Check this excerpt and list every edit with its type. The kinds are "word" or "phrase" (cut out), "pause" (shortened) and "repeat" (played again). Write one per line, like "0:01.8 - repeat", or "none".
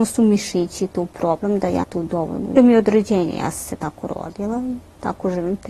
0:01.8 - word
0:02.6 - phrase

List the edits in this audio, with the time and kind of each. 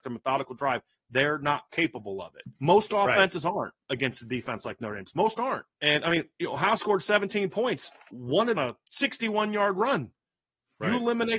0:02.5 - pause
0:05.7 - pause
0:06.8 - word
0:08.6 - phrase

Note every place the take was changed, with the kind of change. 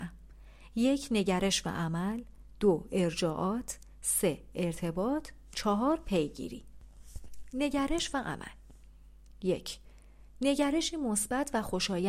none

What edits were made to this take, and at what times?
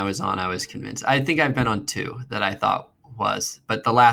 none

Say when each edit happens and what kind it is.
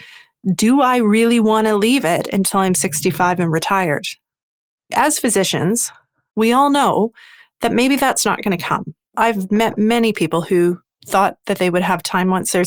none

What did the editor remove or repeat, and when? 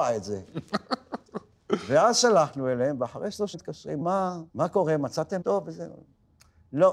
0:03.5 - word
0:04.0 - word
0:04.5 - pause
0:05.4 - word

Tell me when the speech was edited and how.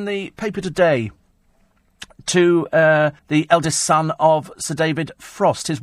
0:03.2 - pause

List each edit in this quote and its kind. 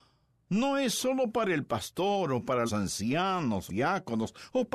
0:02.7 - word
0:03.7 - phrase

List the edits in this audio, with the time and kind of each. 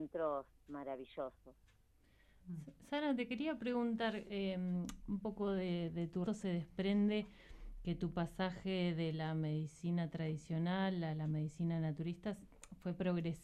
0:06.3 - word

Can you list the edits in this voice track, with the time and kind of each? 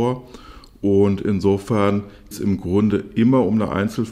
0:02.3 - word

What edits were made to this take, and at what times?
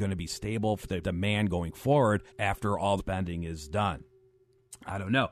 0:01.0 - word
0:02.3 - pause
0:03.0 - phrase

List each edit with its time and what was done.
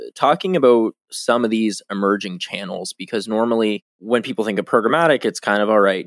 0:03.9 - pause

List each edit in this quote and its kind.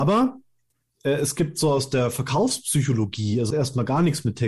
0:03.5 - word

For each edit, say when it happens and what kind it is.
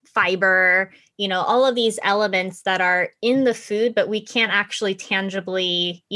none

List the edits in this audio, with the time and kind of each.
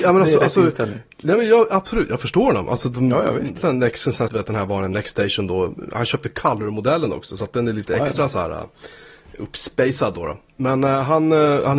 0:04.3 - word

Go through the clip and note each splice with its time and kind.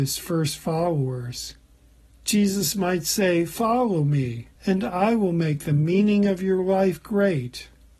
0:01.7 - pause
0:04.6 - pause

